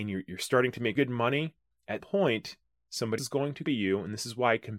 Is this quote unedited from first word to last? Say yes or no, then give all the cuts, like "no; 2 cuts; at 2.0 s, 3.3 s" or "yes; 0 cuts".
no; 4 cuts; at 1.0 s, 2.0 s, 3.2 s, 3.7 s